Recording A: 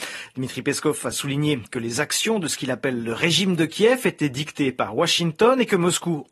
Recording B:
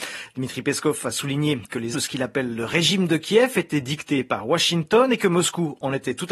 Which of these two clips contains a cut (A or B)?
B